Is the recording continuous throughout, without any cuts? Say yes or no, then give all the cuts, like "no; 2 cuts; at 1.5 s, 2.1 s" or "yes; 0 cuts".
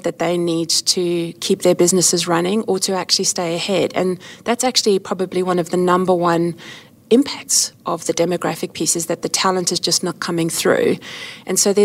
yes; 0 cuts